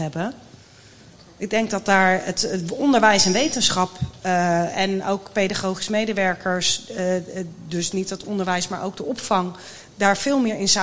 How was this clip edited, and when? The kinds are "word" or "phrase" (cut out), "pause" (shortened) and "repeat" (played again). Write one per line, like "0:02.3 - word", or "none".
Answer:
none